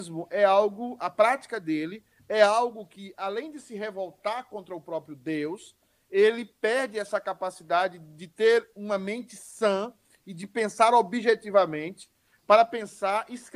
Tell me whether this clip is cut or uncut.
uncut